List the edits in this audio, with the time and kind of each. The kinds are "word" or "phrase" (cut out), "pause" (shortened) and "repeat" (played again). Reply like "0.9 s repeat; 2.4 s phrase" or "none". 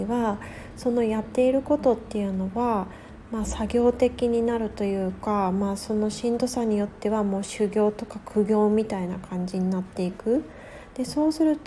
none